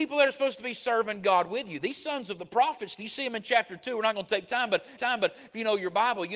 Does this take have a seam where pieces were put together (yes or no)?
yes